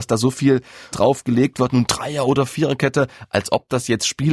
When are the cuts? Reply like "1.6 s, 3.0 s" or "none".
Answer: 0.9 s